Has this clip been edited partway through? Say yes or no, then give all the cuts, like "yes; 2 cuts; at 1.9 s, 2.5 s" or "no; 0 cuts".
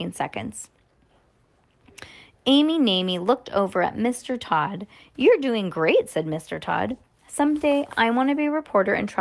no; 0 cuts